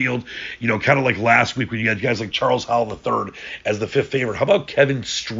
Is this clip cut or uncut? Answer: uncut